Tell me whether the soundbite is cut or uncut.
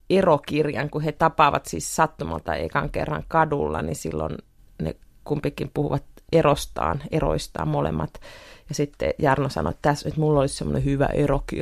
uncut